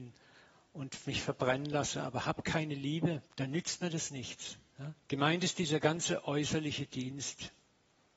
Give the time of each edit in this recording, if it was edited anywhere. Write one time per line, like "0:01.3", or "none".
0:03.3
0:05.0